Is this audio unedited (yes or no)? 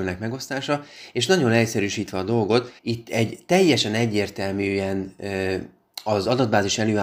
no